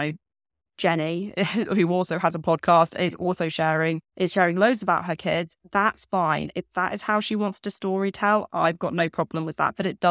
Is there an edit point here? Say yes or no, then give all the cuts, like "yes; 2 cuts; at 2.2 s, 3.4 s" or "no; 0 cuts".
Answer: yes; 1 cut; at 4.1 s